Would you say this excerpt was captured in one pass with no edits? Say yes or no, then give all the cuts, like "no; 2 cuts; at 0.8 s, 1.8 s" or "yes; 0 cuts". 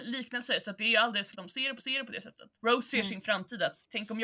no; 3 cuts; at 1.3 s, 1.8 s, 2.5 s